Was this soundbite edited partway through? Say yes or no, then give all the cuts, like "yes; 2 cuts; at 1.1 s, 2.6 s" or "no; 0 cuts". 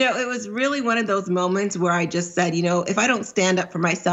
no; 0 cuts